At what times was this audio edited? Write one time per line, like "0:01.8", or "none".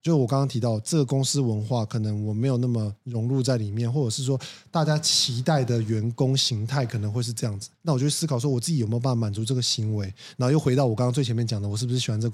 0:07.7